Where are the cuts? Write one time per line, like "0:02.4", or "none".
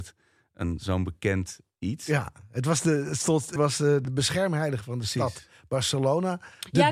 0:03.6
0:04.0